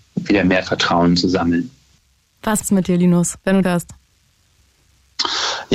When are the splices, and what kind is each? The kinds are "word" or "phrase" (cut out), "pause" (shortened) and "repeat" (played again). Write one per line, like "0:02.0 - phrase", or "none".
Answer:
0:02.6 - word
0:03.6 - word